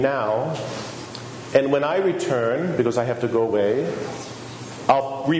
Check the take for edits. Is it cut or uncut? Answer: uncut